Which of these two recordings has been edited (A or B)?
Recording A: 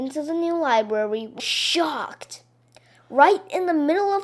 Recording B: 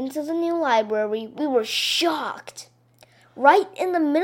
A